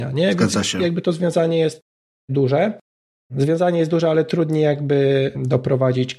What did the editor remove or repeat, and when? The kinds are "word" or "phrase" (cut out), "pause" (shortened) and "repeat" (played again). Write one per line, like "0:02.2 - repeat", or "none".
none